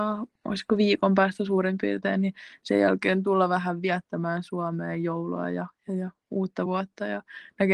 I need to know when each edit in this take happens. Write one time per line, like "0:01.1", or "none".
none